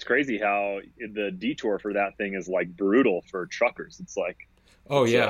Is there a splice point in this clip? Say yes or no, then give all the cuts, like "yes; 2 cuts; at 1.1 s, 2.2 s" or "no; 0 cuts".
no; 0 cuts